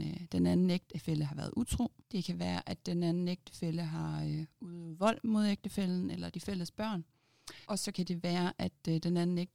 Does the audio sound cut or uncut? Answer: cut